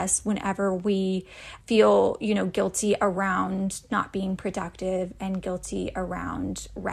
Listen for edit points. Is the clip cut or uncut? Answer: cut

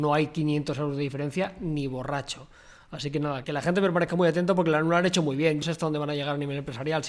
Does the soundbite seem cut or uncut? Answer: cut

